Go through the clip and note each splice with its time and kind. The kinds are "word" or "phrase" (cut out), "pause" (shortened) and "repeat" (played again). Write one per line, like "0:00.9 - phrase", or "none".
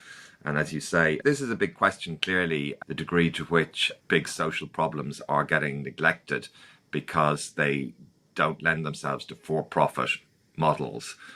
none